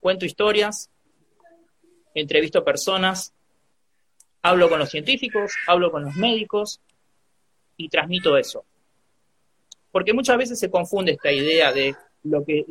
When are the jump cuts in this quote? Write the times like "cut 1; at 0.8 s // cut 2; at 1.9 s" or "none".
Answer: none

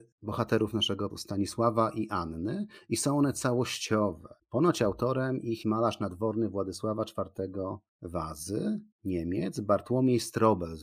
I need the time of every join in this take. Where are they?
cut 1; at 1.1 s // cut 2; at 5.6 s

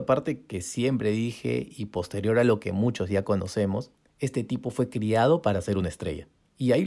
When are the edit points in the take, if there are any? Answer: none

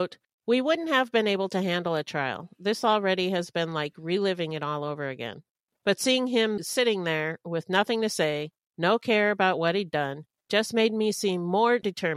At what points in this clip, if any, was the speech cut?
none

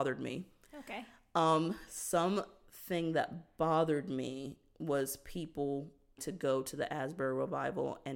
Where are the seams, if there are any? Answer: cut 1; at 6.2 s

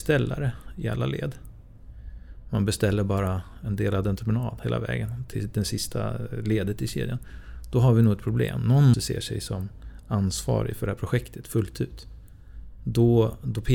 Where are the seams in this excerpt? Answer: cut 1; at 8.9 s

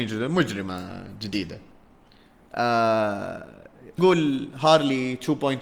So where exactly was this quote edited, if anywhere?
cut 1; at 4.0 s

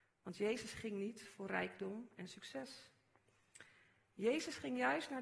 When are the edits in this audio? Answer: none

